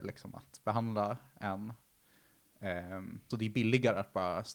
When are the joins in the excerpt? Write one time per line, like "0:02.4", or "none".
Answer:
0:03.3